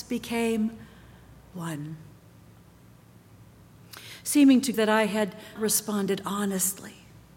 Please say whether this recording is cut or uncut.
cut